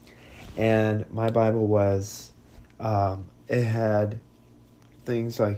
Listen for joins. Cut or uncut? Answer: uncut